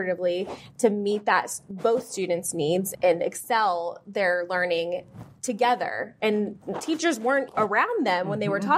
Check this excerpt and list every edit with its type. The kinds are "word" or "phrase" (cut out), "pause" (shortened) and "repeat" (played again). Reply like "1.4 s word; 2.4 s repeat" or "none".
2.9 s word; 7.5 s word

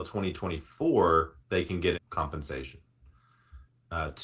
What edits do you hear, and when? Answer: 1.4 s pause; 1.9 s phrase

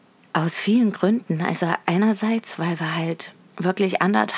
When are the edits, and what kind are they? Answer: 3.4 s pause

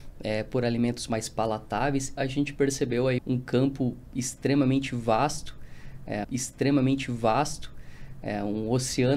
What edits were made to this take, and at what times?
2.2 s phrase; 3.2 s word; 6.2 s repeat

